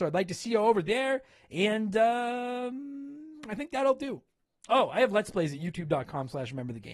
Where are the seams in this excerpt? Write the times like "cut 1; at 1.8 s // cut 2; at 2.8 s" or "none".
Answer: none